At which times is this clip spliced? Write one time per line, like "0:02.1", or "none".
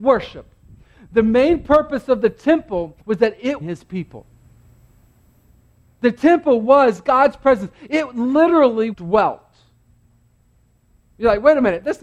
0:03.0
0:03.6
0:08.9